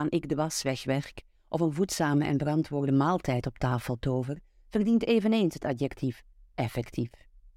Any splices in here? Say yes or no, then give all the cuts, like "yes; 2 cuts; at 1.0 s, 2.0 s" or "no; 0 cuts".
no; 0 cuts